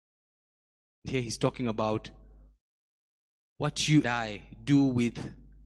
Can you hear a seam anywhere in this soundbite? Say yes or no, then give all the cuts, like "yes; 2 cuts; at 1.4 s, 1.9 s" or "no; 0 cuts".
yes; 1 cut; at 4.0 s